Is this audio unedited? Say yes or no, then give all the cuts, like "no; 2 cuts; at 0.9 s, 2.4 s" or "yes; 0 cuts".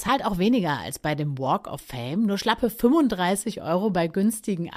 yes; 0 cuts